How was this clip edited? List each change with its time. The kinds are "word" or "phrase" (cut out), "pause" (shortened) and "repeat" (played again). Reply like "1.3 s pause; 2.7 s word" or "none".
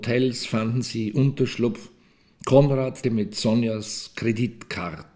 3.0 s word